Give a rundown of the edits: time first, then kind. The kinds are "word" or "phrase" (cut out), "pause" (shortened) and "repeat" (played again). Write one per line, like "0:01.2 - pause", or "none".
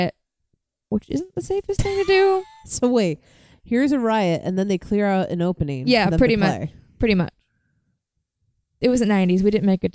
none